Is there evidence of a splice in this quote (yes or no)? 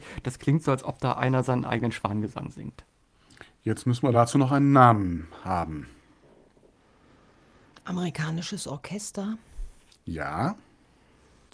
no